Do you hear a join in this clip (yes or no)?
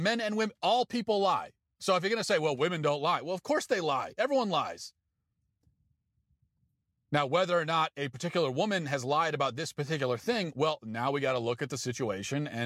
no